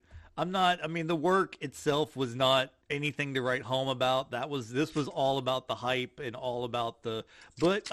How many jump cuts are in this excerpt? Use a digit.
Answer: 1